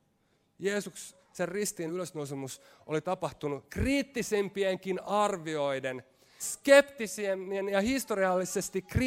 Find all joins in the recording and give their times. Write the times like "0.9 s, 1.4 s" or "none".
1.9 s, 6.4 s